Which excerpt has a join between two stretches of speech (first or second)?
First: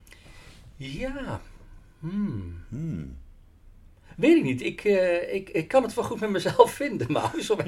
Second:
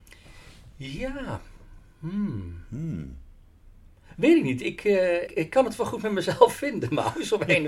second